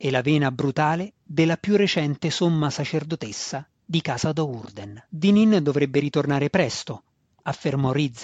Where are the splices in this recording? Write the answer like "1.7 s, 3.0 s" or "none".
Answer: 5.1 s